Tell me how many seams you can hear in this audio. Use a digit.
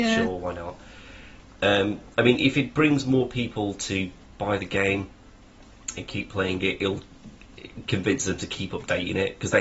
0